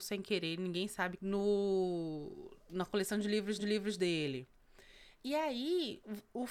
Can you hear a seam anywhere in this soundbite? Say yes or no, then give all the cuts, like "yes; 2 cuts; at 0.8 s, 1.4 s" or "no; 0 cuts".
yes; 2 cuts; at 1.2 s, 3.6 s